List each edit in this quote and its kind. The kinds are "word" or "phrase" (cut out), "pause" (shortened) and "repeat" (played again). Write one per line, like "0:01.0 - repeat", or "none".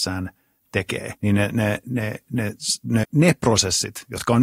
0:01.2 - pause
0:01.8 - word
0:03.0 - word